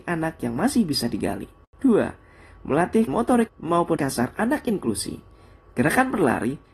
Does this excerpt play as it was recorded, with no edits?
no; 3 cuts; at 3.1 s, 3.5 s, 4.0 s

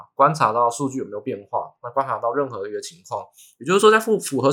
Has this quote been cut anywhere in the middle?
no; 0 cuts

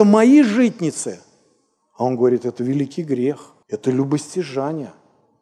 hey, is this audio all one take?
no; 1 cut; at 3.6 s

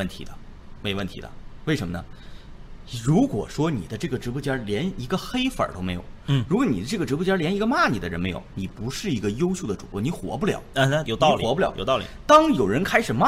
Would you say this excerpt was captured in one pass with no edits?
no; 2 cuts; at 8.5 s, 11.0 s

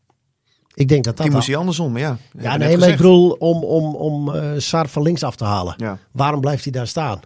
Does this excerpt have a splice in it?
no; 0 cuts

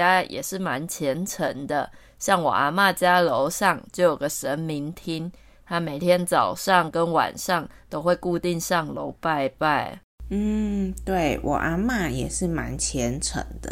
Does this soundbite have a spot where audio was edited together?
no; 0 cuts

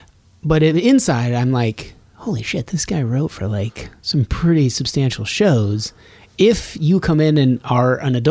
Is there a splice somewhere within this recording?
no; 0 cuts

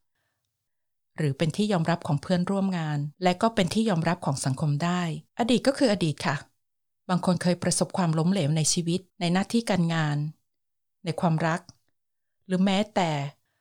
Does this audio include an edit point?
yes; 3 cuts; at 3.1 s, 5.3 s, 9.1 s

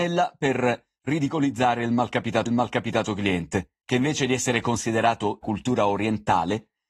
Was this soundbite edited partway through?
yes; 2 cuts; at 2.5 s, 5.4 s

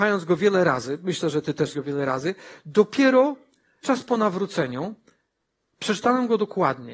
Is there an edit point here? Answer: yes; 2 cuts; at 1.7 s, 3.8 s

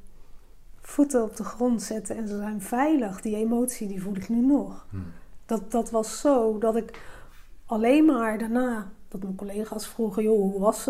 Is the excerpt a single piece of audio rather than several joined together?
yes; 0 cuts

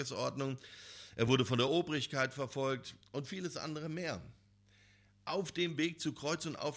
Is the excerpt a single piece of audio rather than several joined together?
yes; 0 cuts

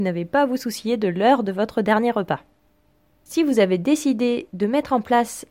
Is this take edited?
no; 0 cuts

